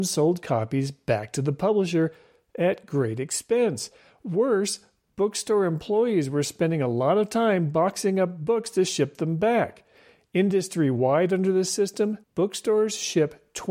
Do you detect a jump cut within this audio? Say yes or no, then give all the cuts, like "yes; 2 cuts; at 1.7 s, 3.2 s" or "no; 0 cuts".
yes; 1 cut; at 12.2 s